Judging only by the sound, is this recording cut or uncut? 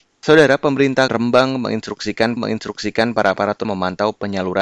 cut